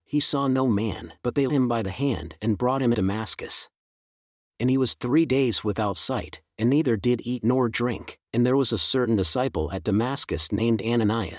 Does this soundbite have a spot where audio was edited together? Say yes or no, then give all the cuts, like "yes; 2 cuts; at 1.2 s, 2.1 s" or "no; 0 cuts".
yes; 4 cuts; at 1.2 s, 1.5 s, 2.9 s, 8.2 s